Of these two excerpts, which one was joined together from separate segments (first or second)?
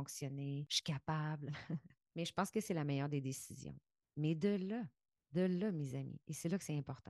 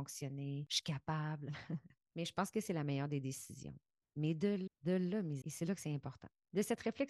second